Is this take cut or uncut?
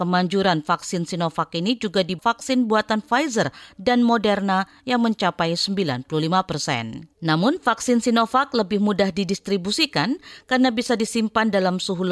cut